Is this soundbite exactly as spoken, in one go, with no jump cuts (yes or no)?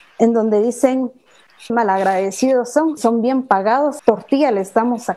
no